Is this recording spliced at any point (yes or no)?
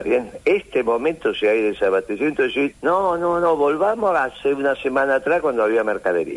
yes